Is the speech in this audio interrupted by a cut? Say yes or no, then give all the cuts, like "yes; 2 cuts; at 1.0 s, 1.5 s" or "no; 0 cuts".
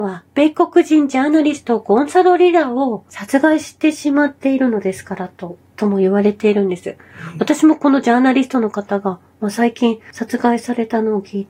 no; 0 cuts